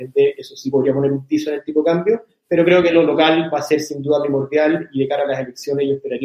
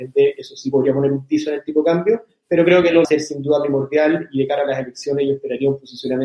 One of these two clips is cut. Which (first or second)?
second